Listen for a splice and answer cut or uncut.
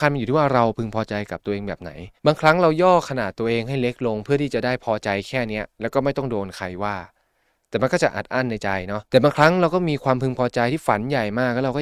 cut